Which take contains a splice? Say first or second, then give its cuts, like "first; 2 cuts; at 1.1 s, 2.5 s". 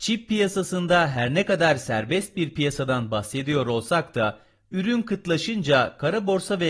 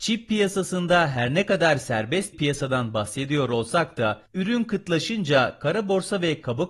second; 2 cuts; at 2.3 s, 4.3 s